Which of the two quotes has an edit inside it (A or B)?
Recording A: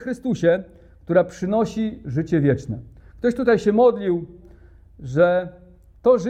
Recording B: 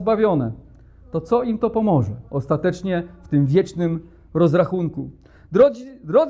B